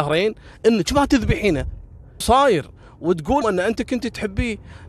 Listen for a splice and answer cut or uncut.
cut